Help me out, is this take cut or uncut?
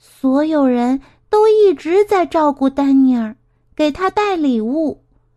uncut